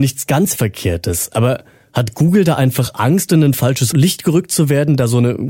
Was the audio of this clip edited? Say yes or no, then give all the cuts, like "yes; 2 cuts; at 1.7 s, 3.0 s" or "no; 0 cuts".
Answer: no; 0 cuts